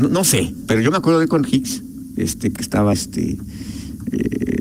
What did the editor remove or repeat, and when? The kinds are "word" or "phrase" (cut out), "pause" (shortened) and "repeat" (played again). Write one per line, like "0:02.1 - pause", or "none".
0:01.4 - word
0:02.6 - phrase
0:02.9 - word